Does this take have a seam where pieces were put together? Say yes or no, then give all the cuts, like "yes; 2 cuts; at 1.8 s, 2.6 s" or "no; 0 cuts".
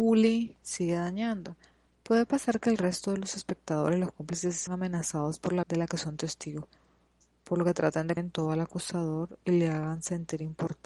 yes; 3 cuts; at 4.7 s, 5.6 s, 8.2 s